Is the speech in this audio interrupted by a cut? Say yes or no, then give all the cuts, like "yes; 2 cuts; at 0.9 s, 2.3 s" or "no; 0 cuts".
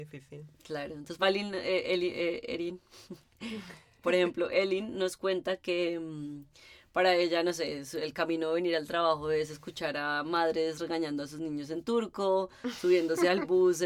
yes; 1 cut; at 1.2 s